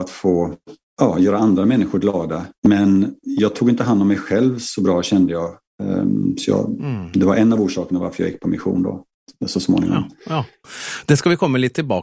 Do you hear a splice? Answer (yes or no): yes